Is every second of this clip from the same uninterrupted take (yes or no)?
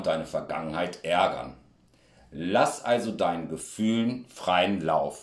yes